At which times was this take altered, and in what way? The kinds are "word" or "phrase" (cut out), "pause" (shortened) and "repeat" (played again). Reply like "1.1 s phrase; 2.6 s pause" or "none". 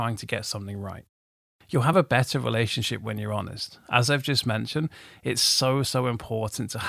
none